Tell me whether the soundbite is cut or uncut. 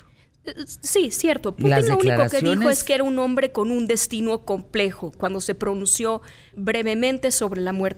cut